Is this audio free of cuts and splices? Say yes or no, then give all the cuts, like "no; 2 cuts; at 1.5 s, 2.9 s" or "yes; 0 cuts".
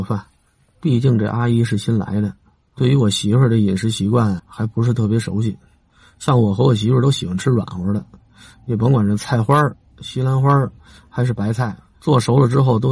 no; 1 cut; at 4.4 s